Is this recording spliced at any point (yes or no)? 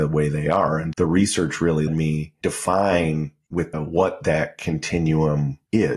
yes